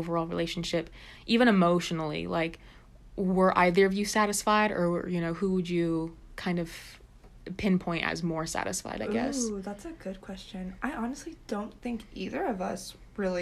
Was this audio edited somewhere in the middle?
no; 0 cuts

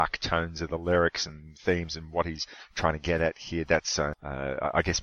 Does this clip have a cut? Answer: no; 0 cuts

